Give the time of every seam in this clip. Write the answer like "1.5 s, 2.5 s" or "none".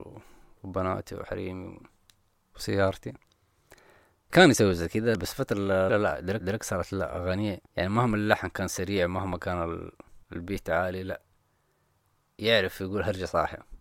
4.3 s, 5.2 s, 5.9 s, 6.4 s, 7.7 s, 10.2 s